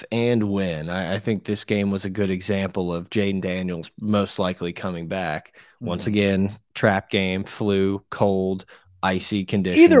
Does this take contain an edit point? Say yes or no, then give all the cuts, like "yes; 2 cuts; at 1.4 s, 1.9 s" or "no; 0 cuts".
no; 0 cuts